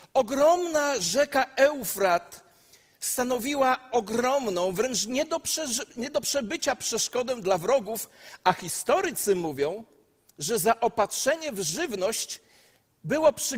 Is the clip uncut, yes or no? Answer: yes